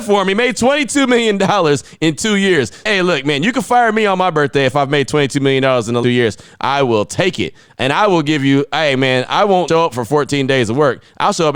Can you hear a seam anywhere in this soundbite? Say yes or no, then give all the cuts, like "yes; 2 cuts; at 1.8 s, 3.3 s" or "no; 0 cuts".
yes; 2 cuts; at 6.0 s, 9.7 s